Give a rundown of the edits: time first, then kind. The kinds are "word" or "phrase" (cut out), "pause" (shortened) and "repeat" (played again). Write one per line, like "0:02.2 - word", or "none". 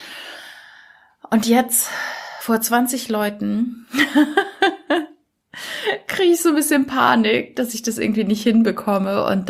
none